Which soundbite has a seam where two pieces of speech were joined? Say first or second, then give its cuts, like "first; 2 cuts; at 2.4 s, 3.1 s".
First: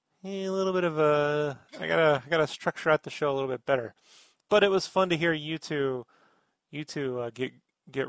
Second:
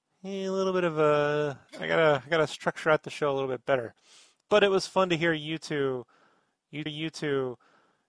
second; 1 cut; at 6.9 s